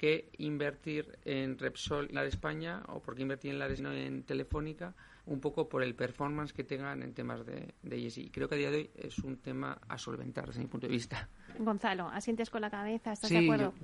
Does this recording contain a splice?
yes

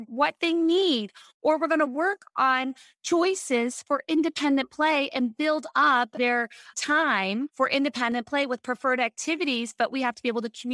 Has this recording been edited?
no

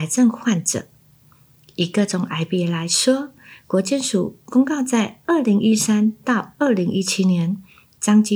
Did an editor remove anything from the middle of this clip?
no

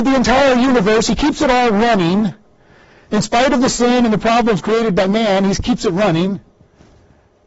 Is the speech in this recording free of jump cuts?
yes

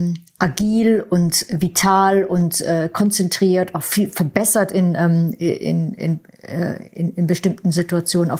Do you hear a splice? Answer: no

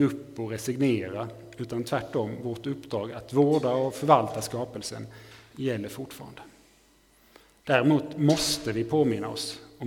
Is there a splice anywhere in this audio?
no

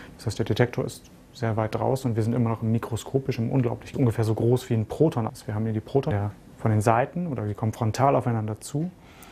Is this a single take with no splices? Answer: no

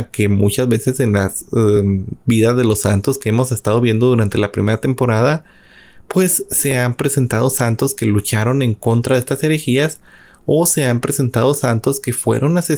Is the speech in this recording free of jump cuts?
yes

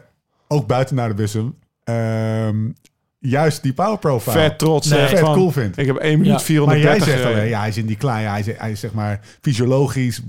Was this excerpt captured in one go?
yes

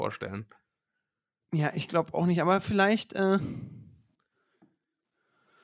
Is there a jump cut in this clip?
no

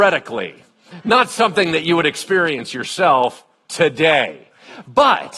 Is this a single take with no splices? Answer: yes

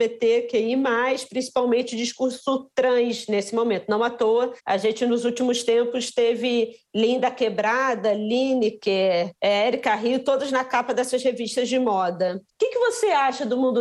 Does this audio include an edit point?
yes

